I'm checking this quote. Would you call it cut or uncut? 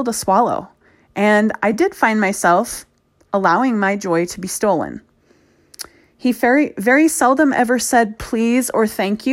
uncut